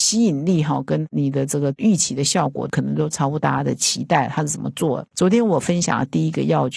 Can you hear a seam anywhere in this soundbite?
no; 0 cuts

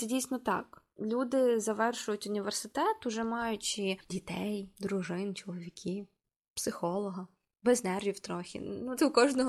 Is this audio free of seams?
yes; 0 cuts

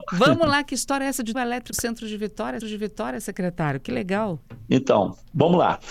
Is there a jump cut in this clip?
yes; 3 cuts; at 1.3 s, 1.7 s, 2.6 s

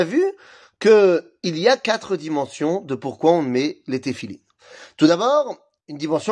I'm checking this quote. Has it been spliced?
no; 0 cuts

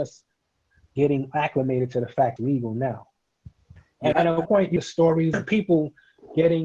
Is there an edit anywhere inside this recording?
yes; 5 cuts; at 2.4 s, 4.1 s, 4.5 s, 4.8 s, 5.3 s

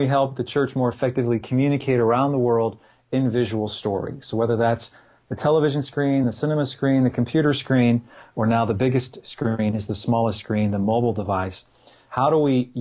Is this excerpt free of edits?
yes; 0 cuts

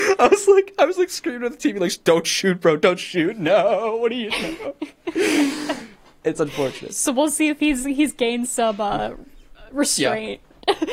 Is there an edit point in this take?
no; 0 cuts

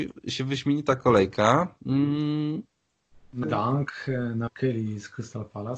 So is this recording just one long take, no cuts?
no; 2 cuts; at 3.4 s, 4.5 s

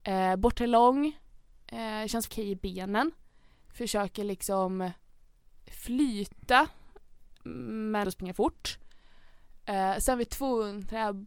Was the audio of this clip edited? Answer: yes; 2 cuts; at 2.3 s, 8.0 s

